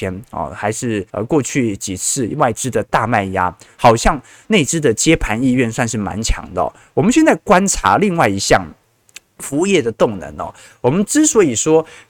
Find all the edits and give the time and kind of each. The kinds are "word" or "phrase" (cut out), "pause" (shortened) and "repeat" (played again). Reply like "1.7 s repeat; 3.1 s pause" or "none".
1.1 s pause